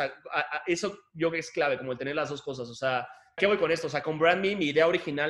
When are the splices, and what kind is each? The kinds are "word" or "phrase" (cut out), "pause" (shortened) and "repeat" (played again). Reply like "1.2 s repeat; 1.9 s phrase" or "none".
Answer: 3.4 s word